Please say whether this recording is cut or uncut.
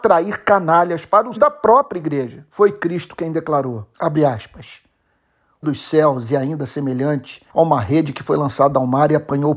cut